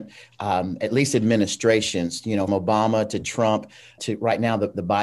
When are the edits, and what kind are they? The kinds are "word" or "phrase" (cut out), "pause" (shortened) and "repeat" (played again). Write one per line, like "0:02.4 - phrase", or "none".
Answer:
0:02.5 - word
0:04.0 - word